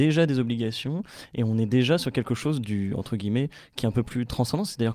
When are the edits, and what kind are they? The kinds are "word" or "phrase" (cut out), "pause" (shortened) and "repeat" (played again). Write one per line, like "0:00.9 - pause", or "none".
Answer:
none